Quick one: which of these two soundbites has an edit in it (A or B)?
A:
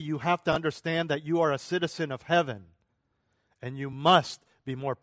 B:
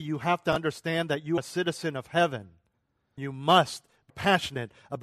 B